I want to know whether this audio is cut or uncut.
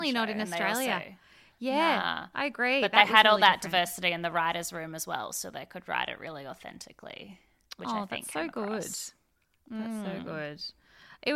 uncut